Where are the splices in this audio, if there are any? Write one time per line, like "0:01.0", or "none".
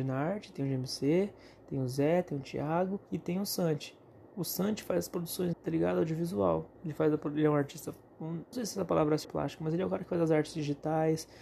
0:03.1
0:04.3
0:05.5
0:06.7
0:08.5
0:09.2

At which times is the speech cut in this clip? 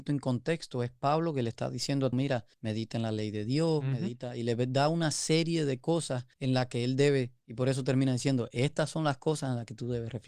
0:02.1
0:02.5
0:06.3

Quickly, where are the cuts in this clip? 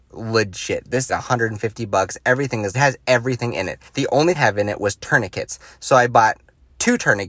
0:01.1
0:02.7
0:03.9
0:04.4

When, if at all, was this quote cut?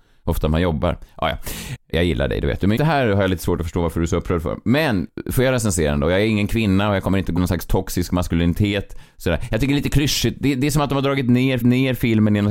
0:01.9
0:02.8
0:07.4
0:11.6

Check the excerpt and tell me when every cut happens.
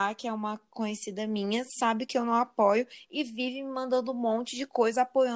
none

